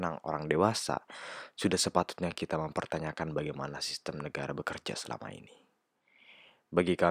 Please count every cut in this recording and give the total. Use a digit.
0